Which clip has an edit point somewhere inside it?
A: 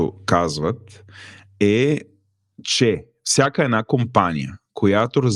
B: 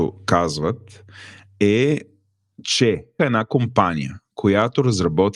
B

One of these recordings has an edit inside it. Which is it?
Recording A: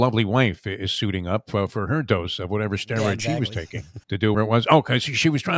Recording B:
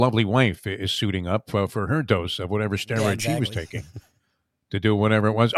A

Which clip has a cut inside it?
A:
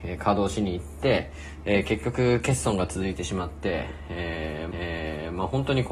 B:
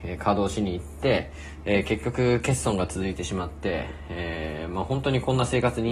A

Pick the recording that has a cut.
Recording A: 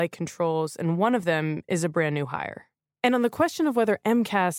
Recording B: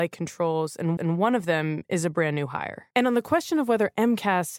B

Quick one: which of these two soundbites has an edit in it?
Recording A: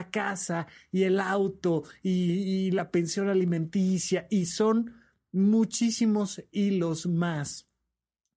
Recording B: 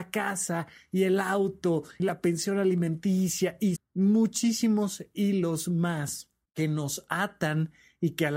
B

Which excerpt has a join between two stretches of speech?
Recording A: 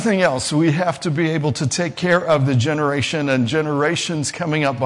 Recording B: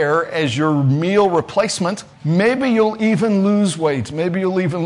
B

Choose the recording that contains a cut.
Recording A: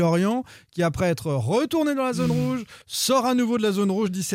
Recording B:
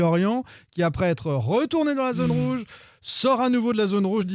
A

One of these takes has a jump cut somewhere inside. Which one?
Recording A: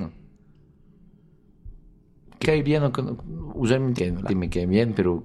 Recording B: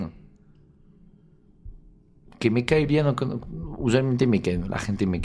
A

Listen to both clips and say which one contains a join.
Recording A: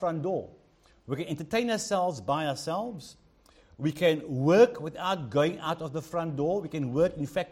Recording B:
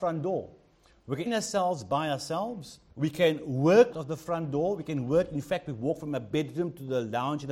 B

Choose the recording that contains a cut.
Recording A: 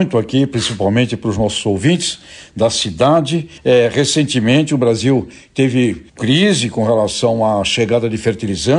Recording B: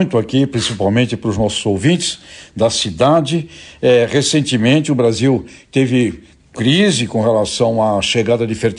A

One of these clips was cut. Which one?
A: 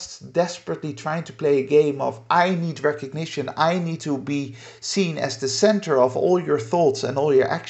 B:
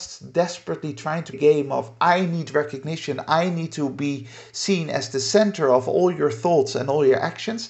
B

